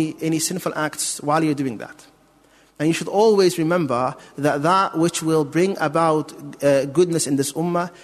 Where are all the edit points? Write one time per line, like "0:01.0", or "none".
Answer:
none